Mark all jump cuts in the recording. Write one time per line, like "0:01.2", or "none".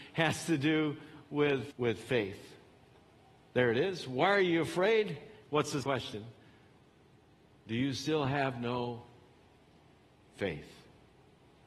0:01.7
0:05.8